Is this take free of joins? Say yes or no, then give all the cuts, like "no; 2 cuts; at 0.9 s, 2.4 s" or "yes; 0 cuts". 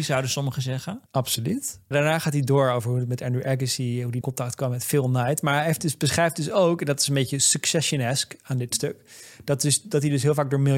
no; 2 cuts; at 1.1 s, 4.2 s